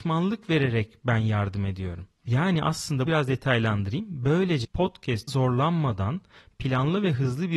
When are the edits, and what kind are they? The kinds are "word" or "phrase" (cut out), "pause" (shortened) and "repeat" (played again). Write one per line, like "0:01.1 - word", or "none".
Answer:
0:02.1 - pause
0:03.1 - word
0:04.6 - word
0:05.3 - word